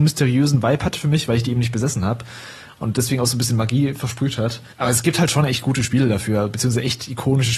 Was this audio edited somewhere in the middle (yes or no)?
yes